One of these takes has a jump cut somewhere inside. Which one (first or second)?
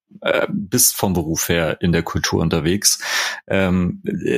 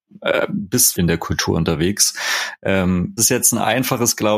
second